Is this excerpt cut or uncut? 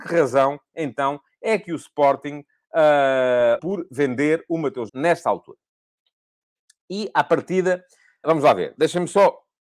cut